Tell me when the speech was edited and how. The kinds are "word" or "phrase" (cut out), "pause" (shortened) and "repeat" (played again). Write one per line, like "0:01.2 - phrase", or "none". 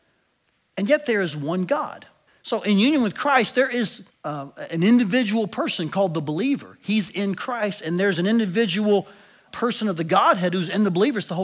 0:02.3 - pause
0:04.1 - pause
0:09.5 - word